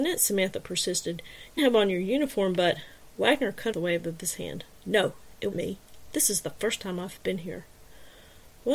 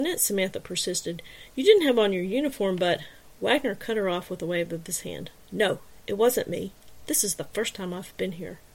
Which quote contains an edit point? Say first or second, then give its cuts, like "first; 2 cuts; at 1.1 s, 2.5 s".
first; 3 cuts; at 1.6 s, 3.7 s, 5.5 s